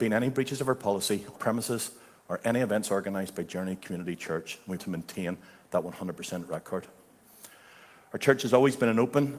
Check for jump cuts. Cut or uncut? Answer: cut